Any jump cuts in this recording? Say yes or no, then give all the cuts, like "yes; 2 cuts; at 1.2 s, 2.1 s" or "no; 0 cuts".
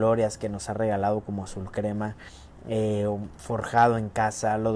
no; 0 cuts